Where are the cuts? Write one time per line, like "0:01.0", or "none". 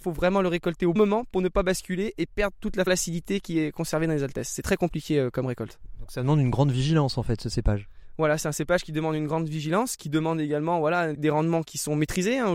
0:01.0
0:02.9
0:11.1
0:11.6

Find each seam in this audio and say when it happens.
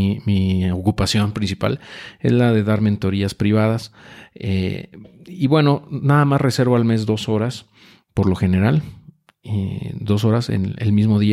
none

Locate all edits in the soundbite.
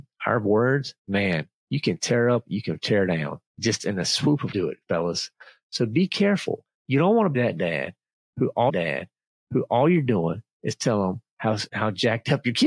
0:01.0
0:03.5
0:04.5
0:07.3
0:08.7
0:11.7

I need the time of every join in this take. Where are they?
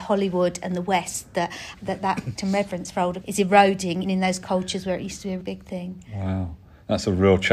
0:01.7
0:02.4
0:03.2
0:04.0
0:05.4

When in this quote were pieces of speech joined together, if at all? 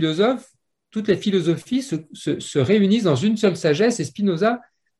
none

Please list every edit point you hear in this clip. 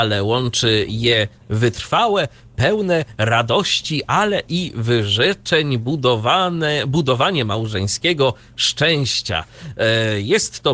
none

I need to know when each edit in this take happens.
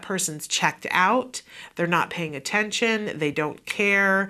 none

